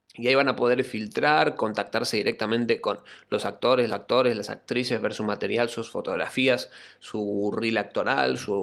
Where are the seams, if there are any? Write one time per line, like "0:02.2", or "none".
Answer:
0:03.9